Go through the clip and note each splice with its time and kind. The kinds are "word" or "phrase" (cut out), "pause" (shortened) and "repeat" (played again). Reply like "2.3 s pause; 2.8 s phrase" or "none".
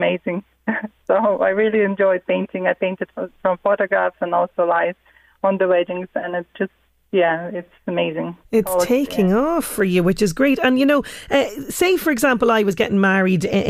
none